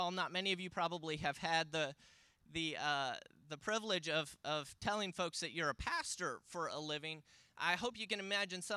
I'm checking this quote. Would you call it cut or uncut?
uncut